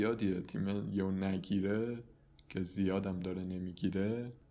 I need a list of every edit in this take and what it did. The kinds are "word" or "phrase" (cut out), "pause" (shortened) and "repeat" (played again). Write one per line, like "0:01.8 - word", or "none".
none